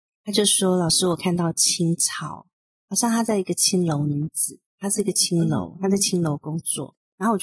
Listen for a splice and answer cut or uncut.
uncut